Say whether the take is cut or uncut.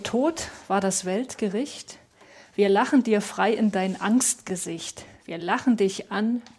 uncut